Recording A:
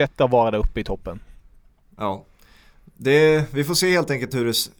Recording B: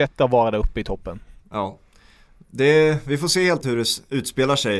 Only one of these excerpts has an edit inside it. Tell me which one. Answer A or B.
B